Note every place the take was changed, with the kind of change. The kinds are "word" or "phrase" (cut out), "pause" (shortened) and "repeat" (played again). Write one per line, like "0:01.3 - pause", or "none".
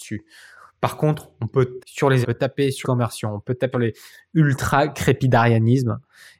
0:01.8 - word
0:02.2 - phrase
0:02.8 - word
0:03.7 - word

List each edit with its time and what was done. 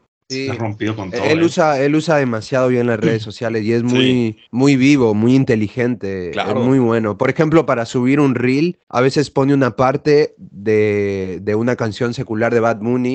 0:04.5 - pause
0:08.8 - pause

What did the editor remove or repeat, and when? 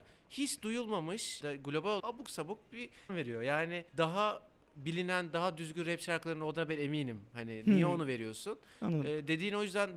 0:01.4 - phrase
0:02.0 - phrase
0:03.1 - phrase
0:03.9 - pause

